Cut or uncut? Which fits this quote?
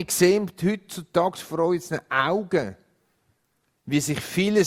uncut